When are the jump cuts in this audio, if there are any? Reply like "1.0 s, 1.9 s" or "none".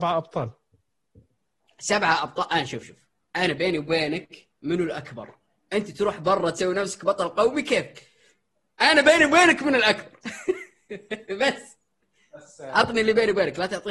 none